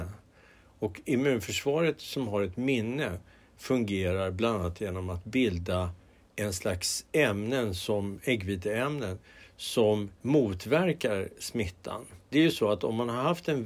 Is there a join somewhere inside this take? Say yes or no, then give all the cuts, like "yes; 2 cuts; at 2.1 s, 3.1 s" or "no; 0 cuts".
no; 0 cuts